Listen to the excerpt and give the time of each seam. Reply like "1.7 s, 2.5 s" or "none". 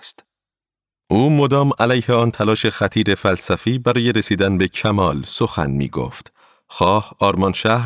none